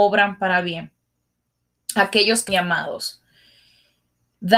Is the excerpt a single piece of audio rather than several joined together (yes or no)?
no